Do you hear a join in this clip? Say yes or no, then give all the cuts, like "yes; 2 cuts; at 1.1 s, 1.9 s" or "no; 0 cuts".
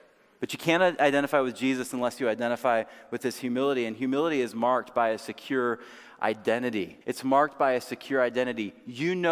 yes; 1 cut; at 7.0 s